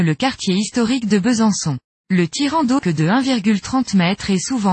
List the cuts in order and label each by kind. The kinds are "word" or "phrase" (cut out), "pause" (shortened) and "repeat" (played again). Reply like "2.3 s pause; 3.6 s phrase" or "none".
2.8 s word